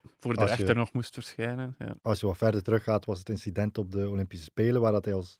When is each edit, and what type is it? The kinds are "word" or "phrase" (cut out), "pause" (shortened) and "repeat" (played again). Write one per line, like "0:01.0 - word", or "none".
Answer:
0:02.0 - pause

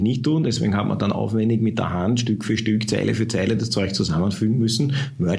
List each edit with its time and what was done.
none

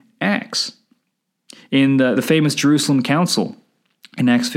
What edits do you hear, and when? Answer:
0:02.1 - word

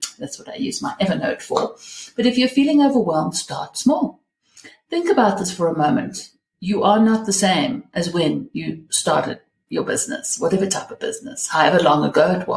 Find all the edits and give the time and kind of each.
none

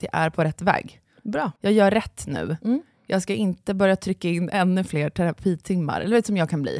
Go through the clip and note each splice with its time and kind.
none

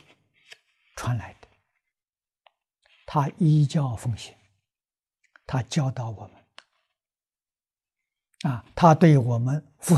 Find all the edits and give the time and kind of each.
none

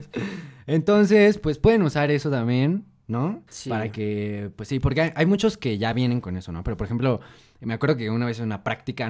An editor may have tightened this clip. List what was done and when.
0:03.5 - pause

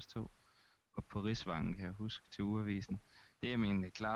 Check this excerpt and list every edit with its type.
none

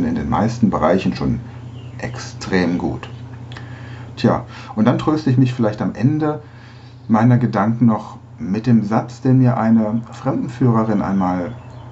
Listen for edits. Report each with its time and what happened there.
none

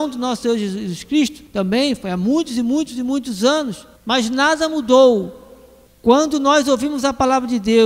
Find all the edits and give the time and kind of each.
0:01.5 - pause
0:04.0 - pause
0:05.9 - pause

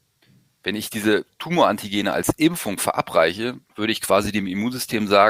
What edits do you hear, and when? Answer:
0:01.3 - pause
0:03.6 - pause

